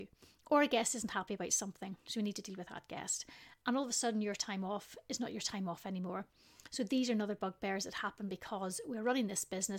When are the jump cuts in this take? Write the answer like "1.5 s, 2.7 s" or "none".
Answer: none